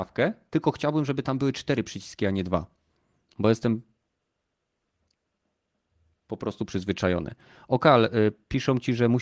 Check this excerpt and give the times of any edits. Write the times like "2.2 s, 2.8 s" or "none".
none

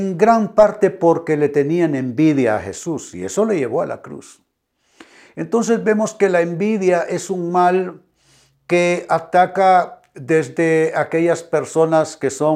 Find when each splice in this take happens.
none

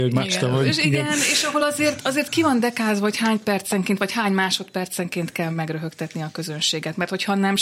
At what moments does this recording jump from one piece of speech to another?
none

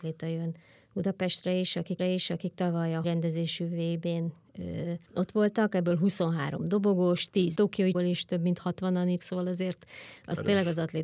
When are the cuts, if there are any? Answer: 2.0 s, 3.0 s, 5.1 s, 7.6 s, 7.9 s, 9.2 s

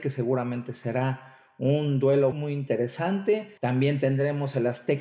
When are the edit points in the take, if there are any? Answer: 2.3 s, 3.6 s

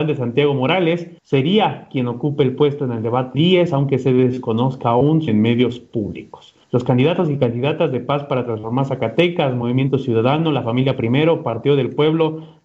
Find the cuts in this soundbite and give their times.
1.2 s, 3.3 s, 5.3 s, 6.6 s

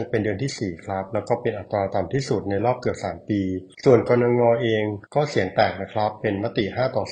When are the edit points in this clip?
3.7 s, 5.1 s

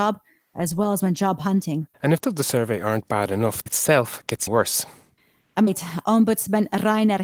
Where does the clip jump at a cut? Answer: 1.9 s, 2.2 s, 3.7 s, 4.5 s, 5.7 s

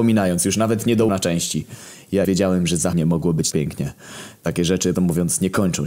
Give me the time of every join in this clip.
1.1 s, 2.2 s, 2.9 s, 3.5 s, 4.9 s

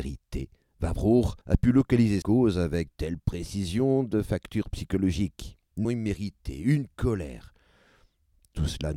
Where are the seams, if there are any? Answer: 1.4 s, 2.2 s, 2.9 s, 5.8 s

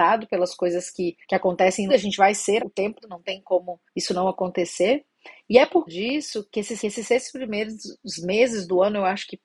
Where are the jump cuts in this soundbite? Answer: 1.2 s, 1.9 s, 2.6 s, 3.0 s, 3.9 s, 5.9 s, 6.5 s, 6.8 s

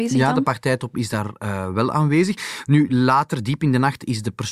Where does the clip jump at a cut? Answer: none

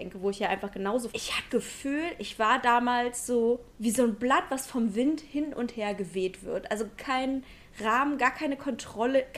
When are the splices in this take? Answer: 1.1 s, 1.5 s, 3.7 s, 7.0 s

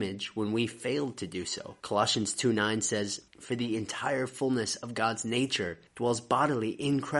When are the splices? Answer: 1.8 s, 3.3 s, 5.9 s

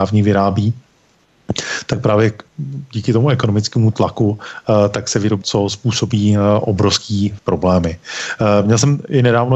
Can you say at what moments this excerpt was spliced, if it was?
5.4 s, 7.4 s

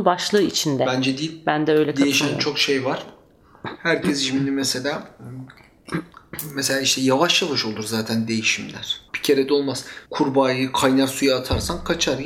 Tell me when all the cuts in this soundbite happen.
9.1 s, 10.0 s

